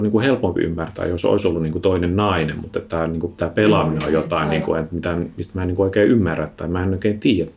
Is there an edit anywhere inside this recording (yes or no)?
no